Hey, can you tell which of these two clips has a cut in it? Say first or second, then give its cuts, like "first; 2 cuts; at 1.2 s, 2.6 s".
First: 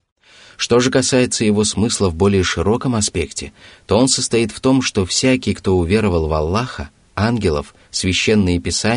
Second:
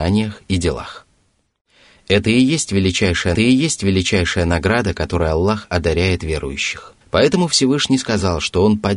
second; 2 cuts; at 3.3 s, 7.0 s